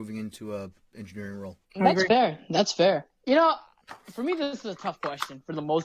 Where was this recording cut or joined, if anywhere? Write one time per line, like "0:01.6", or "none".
0:01.6
0:03.1